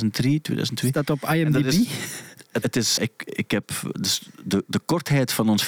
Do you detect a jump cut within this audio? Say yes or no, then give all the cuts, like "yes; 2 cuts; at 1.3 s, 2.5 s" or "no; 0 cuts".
yes; 3 cuts; at 2.6 s, 3.0 s, 3.9 s